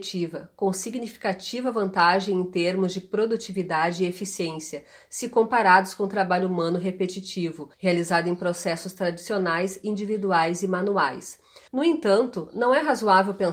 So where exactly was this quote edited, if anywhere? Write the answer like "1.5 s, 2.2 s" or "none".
7.7 s, 11.7 s